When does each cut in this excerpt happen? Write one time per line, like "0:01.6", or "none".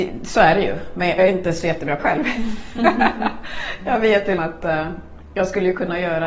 0:01.2
0:02.0
0:04.4